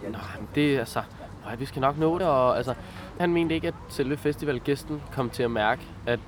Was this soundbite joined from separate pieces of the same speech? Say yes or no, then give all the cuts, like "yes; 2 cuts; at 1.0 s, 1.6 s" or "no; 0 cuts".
yes; 3 cuts; at 1.6 s, 2.2 s, 3.2 s